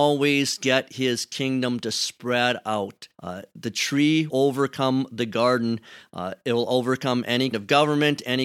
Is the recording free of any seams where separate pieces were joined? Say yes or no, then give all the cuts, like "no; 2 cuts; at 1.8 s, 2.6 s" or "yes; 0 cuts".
no; 3 cuts; at 3.1 s, 4.3 s, 7.5 s